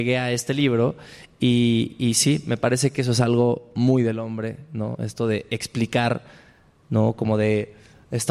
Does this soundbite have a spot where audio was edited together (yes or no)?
no